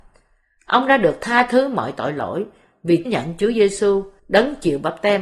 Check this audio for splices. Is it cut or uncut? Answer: cut